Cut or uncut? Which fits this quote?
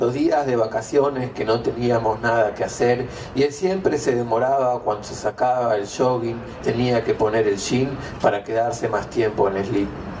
cut